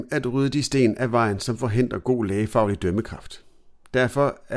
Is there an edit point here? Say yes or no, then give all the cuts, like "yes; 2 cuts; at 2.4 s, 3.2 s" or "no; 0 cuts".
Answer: no; 0 cuts